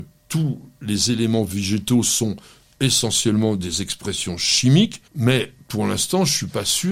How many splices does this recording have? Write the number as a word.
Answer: one